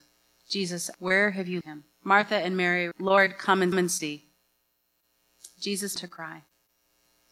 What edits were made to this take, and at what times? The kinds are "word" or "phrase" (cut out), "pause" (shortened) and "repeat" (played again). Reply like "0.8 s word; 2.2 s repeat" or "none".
0.9 s word; 1.6 s word; 1.9 s pause; 2.9 s word; 3.7 s repeat; 6.0 s word